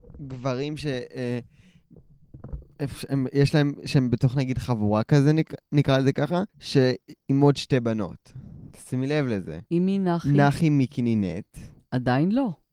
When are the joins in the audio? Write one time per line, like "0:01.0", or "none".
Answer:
0:06.5
0:09.7